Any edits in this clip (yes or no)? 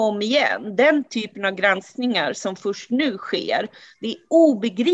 no